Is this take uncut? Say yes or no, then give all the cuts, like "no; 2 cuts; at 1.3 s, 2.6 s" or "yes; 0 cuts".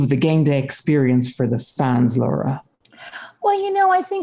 yes; 0 cuts